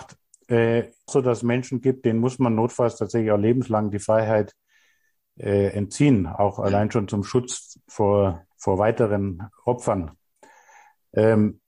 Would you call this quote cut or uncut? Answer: cut